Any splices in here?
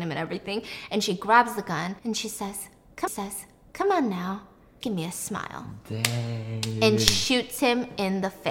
yes; 3 cuts; at 2.0 s, 3.1 s, 4.8 s

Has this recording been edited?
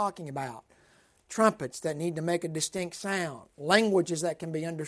no; 0 cuts

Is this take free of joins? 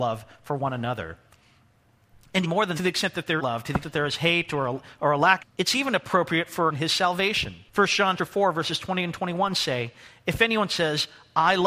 no; 8 cuts; at 2.4 s, 2.8 s, 3.4 s, 3.8 s, 5.4 s, 6.7 s, 7.7 s, 8.2 s

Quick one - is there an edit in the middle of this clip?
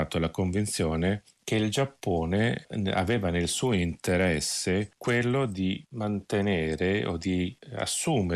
no; 0 cuts

